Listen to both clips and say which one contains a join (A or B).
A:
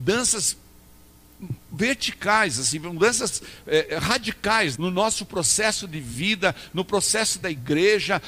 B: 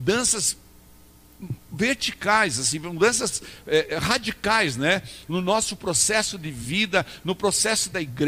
A